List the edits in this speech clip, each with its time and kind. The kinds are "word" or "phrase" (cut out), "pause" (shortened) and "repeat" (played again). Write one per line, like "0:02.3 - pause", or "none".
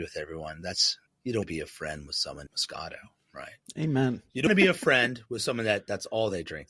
0:01.1 - pause
0:01.4 - word
0:02.5 - phrase
0:04.5 - word